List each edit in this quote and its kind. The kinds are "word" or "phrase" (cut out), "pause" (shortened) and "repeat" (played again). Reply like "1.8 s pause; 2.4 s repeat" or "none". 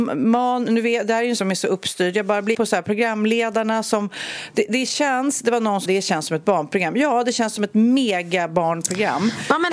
1.4 s word; 2.5 s word; 5.9 s word